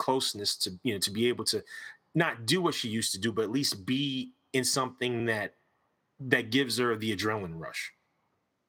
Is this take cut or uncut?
uncut